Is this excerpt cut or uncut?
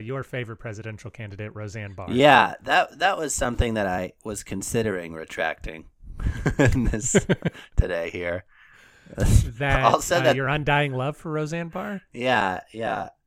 uncut